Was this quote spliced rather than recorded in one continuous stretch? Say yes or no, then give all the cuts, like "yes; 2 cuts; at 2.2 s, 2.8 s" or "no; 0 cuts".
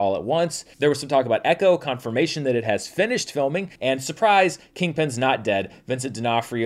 yes; 1 cut; at 3.8 s